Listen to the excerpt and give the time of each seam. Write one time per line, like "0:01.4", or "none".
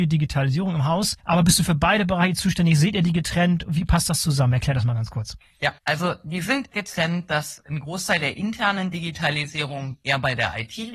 0:01.2
0:06.7